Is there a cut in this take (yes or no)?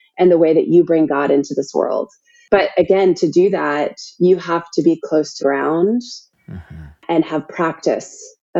yes